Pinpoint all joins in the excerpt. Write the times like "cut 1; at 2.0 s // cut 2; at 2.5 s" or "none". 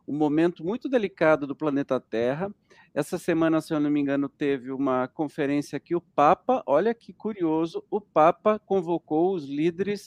none